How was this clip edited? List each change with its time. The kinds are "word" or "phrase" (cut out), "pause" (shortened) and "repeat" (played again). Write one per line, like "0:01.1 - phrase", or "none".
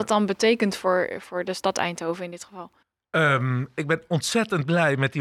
0:02.8 - pause